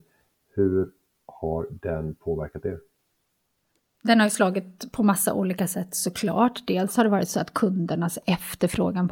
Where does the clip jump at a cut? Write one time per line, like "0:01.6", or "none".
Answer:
none